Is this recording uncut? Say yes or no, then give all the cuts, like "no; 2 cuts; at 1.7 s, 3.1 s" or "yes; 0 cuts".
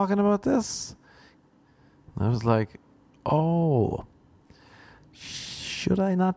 yes; 0 cuts